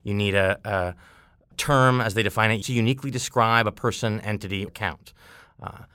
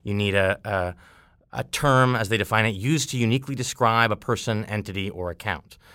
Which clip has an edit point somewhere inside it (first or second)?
first